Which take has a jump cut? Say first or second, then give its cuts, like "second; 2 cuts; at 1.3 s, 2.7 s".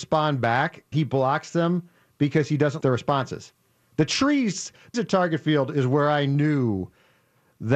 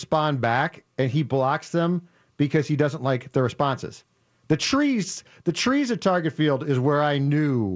first; 3 cuts; at 0.9 s, 2.8 s, 4.9 s